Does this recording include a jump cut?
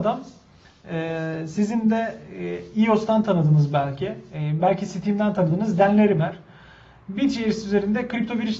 no; 0 cuts

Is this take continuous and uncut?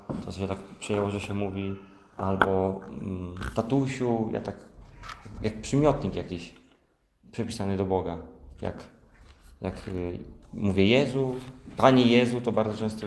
yes; 0 cuts

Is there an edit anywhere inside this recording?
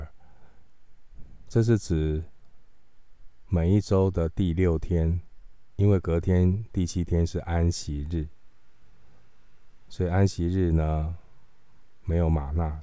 yes; 1 cut; at 5.7 s

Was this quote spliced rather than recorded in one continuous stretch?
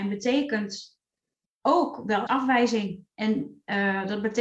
yes; 1 cut; at 2.3 s

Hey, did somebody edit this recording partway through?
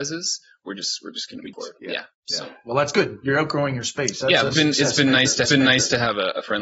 yes; 3 cuts; at 1.5 s, 4.5 s, 5.5 s

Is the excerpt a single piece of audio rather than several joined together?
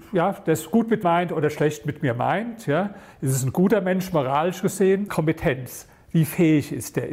no; 2 cuts; at 1.0 s, 5.1 s

